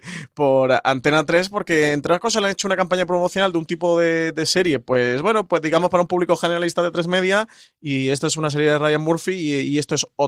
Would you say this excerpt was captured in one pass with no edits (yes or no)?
yes